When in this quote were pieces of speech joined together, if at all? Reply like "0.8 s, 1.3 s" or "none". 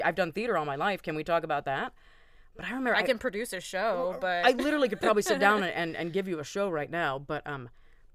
none